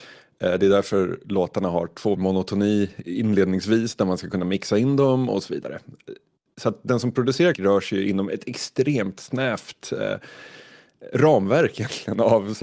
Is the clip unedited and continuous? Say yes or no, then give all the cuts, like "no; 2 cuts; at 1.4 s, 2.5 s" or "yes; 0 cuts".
no; 2 cuts; at 2.1 s, 7.5 s